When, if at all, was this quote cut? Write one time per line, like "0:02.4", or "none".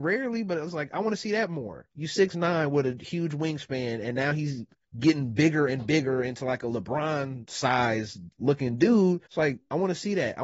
0:04.8
0:09.3